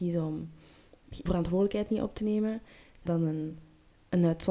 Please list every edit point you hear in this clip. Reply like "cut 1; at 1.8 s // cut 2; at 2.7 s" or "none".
cut 1; at 1.3 s // cut 2; at 3.1 s